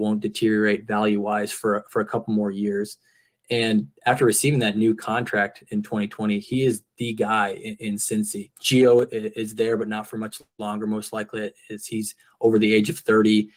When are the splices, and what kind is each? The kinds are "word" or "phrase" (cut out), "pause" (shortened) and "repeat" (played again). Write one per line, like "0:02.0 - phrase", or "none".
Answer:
none

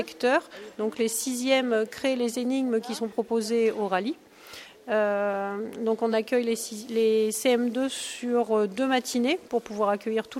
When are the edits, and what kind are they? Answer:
none

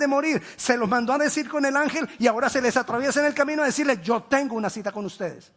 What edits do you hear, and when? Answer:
none

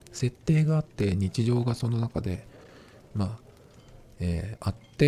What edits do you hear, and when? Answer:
none

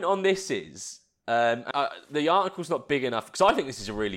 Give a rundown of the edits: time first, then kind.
0:01.7 - word

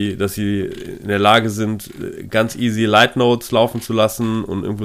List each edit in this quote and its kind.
none

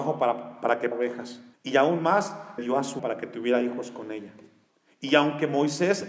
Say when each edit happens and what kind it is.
0:00.9 - word
0:01.5 - pause
0:02.6 - word
0:03.0 - word
0:04.7 - pause

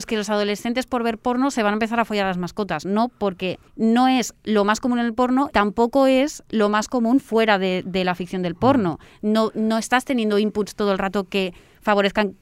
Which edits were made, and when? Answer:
0:03.7 - pause
0:05.5 - word

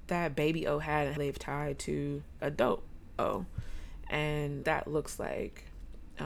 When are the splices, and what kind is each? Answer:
0:01.2 - word
0:02.4 - word
0:04.6 - word

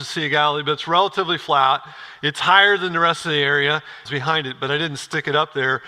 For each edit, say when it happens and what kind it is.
0:04.1 - phrase

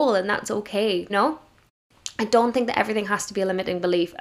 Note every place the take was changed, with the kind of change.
0:01.1 - word

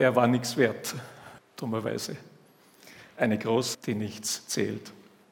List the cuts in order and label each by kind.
0:01.4 - word
0:03.7 - word

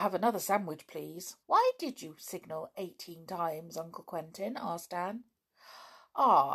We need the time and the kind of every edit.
0:01.4 - pause

